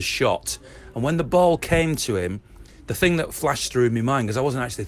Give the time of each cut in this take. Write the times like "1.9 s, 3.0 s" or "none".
none

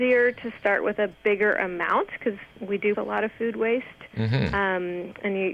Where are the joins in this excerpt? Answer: 1.2 s, 2.5 s, 2.9 s

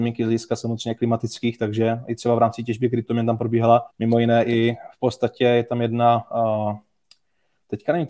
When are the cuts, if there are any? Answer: 2.0 s, 3.9 s

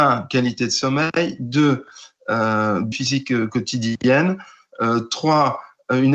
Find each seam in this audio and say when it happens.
2.9 s

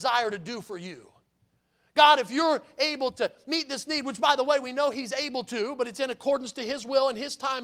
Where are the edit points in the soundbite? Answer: none

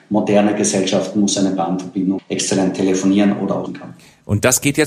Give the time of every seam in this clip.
2.2 s, 3.7 s

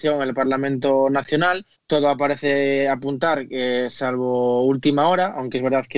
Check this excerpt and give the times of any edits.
1.8 s

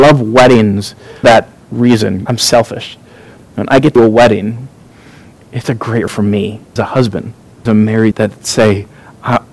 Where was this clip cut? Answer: 1.2 s, 2.3 s, 4.0 s, 5.6 s, 6.1 s, 6.8 s, 7.7 s, 8.1 s

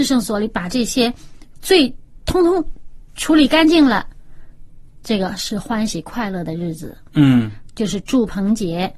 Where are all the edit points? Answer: 3.1 s

